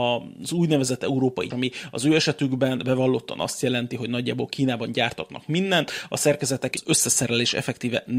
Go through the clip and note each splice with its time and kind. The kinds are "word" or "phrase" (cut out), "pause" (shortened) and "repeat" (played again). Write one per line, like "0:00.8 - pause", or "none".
0:01.5 - word
0:06.7 - phrase